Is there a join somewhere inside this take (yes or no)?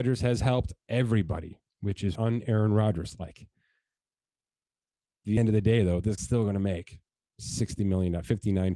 yes